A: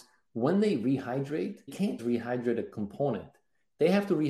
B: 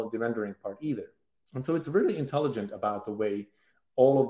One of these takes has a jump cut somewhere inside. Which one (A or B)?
A